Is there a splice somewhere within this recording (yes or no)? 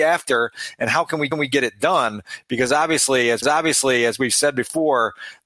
yes